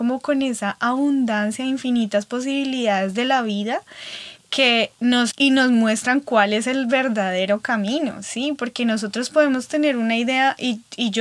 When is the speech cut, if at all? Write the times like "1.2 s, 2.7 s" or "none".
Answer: 5.3 s